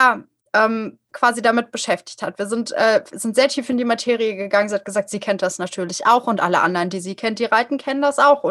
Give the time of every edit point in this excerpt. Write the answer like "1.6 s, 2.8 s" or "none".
1.0 s